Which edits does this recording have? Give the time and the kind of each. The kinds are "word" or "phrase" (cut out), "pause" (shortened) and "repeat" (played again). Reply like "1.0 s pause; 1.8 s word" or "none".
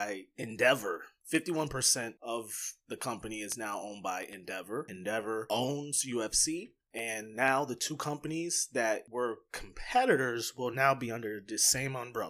none